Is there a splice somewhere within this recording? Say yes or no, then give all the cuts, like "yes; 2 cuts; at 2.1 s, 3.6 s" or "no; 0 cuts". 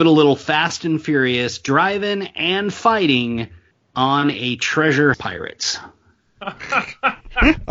yes; 1 cut; at 5.1 s